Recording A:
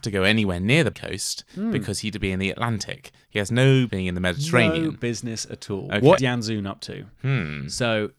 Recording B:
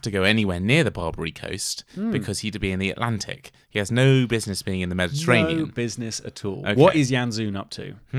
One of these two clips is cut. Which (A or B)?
A